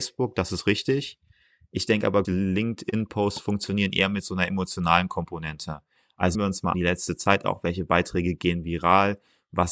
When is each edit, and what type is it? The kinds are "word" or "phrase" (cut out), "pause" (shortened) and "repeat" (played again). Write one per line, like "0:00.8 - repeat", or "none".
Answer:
0:02.2 - word
0:06.3 - word
0:06.7 - word